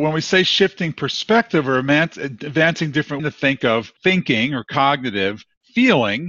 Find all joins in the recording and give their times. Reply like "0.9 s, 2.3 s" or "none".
3.2 s, 4.0 s